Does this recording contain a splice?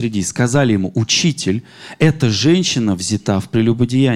no; 0 cuts

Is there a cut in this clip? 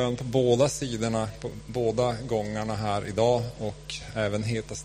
no; 0 cuts

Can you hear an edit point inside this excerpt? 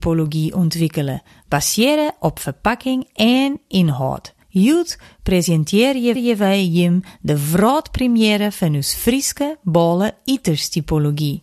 yes; 2 cuts; at 4.4 s, 6.2 s

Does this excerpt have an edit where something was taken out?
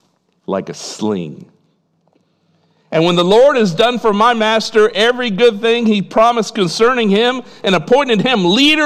no; 0 cuts

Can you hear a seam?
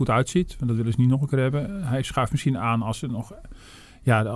no; 0 cuts

